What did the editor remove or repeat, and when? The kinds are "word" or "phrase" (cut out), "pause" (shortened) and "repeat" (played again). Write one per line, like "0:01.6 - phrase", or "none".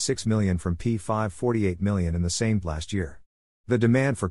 0:02.6 - word